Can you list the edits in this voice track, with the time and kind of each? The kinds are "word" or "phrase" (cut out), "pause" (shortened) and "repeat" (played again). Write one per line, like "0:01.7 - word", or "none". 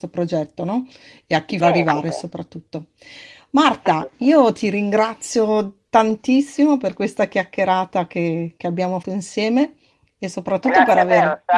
0:01.6 - word
0:08.6 - word
0:09.0 - word